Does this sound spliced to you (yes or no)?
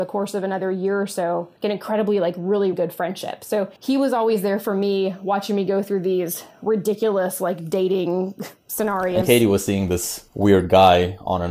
yes